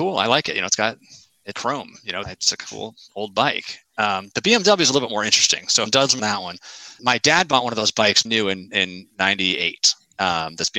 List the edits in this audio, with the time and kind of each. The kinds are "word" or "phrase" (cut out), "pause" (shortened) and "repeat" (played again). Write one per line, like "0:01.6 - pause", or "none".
0:01.5 - word
0:02.2 - word
0:05.9 - word
0:06.2 - word
0:07.0 - word
0:08.3 - word